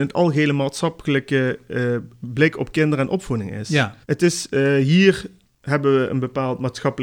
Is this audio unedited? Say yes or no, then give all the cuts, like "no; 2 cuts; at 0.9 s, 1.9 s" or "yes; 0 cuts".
no; 2 cuts; at 4.0 s, 5.4 s